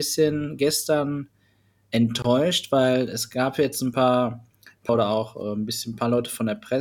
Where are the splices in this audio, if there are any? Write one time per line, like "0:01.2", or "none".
0:04.9